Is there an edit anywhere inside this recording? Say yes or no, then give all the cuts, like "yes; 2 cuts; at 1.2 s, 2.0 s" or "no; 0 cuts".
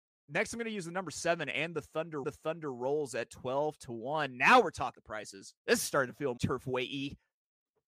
yes; 4 cuts; at 2.2 s, 4.9 s, 5.6 s, 6.4 s